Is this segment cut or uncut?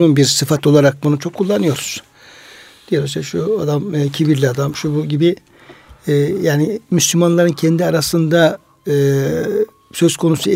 uncut